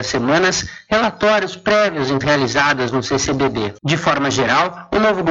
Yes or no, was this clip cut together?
yes